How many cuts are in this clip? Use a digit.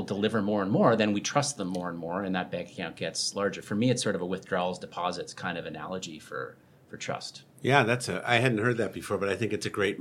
0